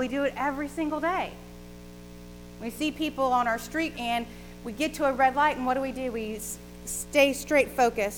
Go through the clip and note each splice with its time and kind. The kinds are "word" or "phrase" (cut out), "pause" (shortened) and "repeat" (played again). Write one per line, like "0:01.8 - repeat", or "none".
0:03.9 - word